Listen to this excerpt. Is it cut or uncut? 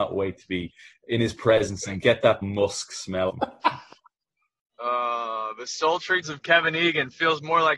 cut